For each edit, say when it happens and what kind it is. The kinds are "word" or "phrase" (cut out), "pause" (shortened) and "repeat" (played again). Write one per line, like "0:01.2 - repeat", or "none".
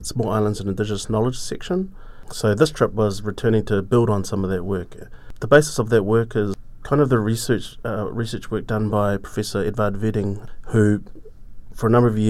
none